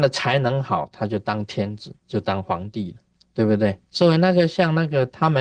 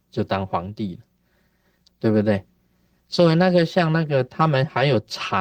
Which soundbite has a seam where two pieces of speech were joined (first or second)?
first